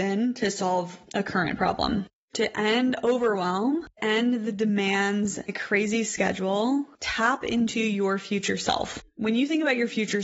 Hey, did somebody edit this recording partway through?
yes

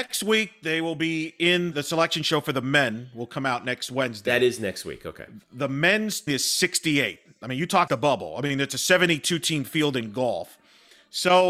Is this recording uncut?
no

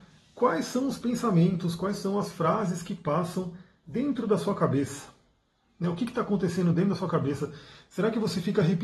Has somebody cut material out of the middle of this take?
no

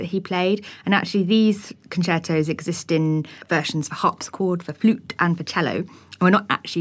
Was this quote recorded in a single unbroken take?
no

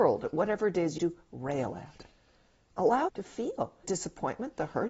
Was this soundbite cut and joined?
yes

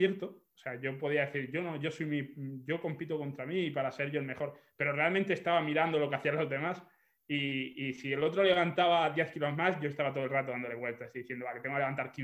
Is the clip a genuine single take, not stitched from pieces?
yes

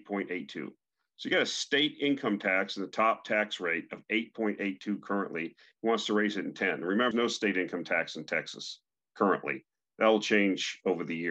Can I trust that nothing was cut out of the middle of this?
no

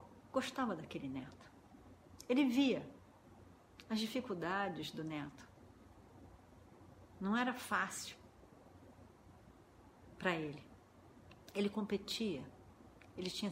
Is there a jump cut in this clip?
yes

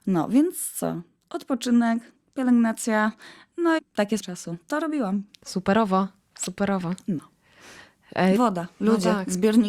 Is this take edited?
yes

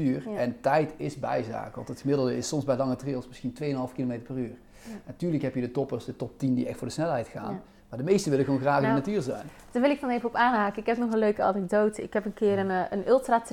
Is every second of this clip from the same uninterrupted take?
yes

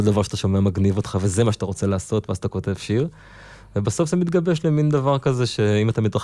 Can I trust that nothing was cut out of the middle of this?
yes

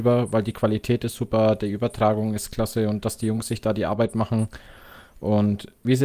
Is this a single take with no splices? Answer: yes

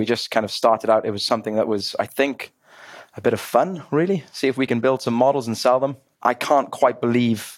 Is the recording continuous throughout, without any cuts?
yes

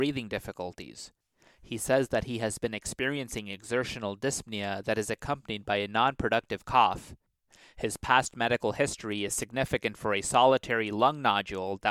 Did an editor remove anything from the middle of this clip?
no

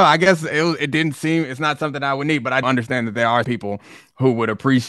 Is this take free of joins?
no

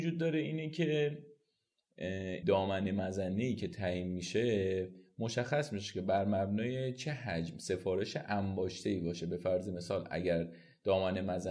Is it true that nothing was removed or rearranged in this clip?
no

